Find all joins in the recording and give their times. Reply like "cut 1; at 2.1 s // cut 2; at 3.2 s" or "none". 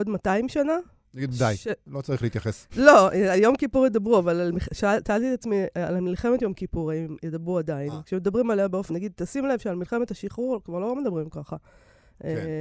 cut 1; at 8.9 s